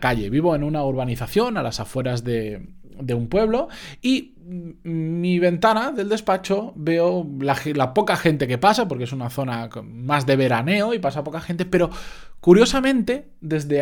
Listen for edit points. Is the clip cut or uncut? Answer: uncut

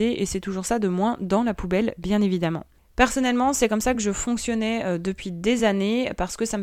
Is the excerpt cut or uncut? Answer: uncut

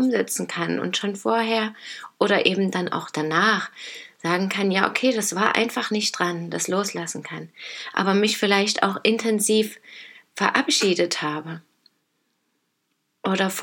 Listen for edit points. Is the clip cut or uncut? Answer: uncut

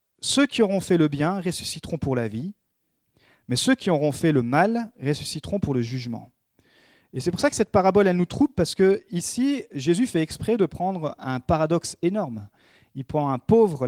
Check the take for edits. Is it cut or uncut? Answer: uncut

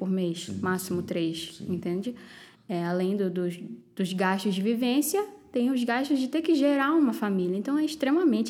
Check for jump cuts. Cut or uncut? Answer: uncut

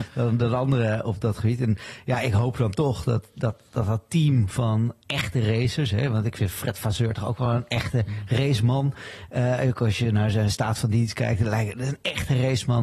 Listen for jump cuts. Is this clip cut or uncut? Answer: uncut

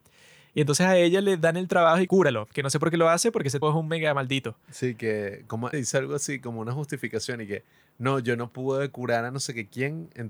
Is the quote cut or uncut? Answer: cut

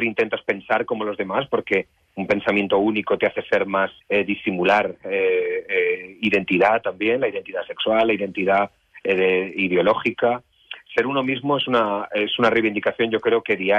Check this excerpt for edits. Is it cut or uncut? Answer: cut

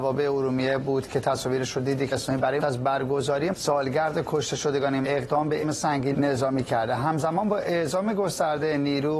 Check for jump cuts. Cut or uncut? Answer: cut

